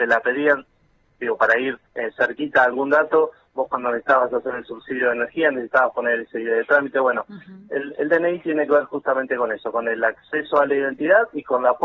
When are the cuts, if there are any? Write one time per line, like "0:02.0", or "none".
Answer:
0:01.9